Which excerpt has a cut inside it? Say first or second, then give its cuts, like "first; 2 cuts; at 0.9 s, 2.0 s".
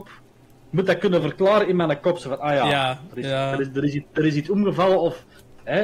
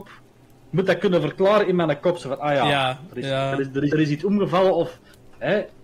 second; 1 cut; at 3.9 s